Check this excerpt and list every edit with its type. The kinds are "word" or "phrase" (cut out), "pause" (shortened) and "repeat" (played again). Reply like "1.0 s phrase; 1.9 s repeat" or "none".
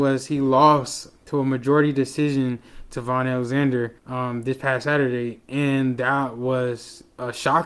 1.2 s pause; 4.0 s pause